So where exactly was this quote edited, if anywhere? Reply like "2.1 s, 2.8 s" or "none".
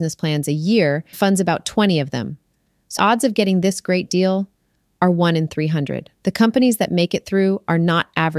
1.1 s, 3.0 s, 6.1 s